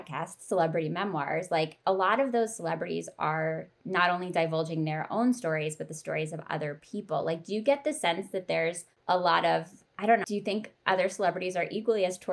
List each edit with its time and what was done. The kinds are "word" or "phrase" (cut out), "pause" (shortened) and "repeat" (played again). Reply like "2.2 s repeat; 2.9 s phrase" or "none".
3.8 s pause; 10.2 s word